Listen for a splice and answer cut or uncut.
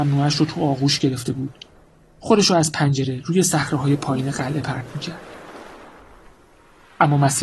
uncut